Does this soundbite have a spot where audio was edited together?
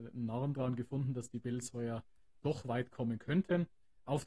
no; 0 cuts

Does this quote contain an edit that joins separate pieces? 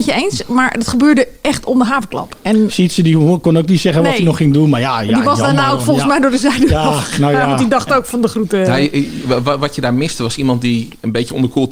no; 0 cuts

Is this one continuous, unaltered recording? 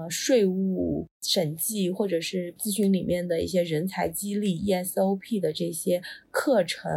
yes; 0 cuts

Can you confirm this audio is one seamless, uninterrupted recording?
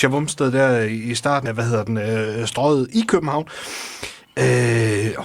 no; 1 cut; at 1.5 s

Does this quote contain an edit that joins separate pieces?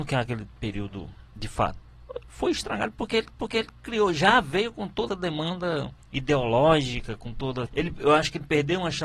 yes; 4 cuts; at 3.4 s, 5.1 s, 6.0 s, 7.7 s

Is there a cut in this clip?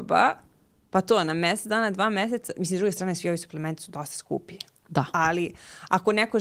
no; 0 cuts

